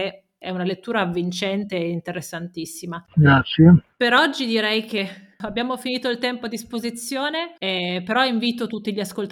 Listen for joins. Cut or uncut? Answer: cut